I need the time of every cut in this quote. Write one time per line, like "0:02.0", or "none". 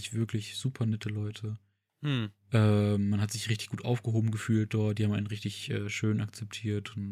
none